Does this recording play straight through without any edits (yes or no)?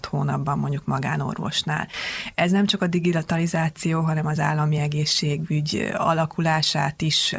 yes